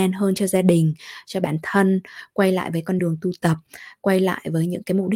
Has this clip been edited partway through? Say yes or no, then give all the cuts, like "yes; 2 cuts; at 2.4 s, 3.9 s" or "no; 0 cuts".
no; 0 cuts